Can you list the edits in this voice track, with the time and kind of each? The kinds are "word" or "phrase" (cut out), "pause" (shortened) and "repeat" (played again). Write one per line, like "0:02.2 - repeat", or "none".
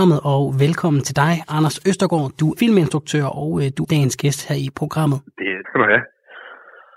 0:02.6 - word
0:03.8 - word
0:05.6 - word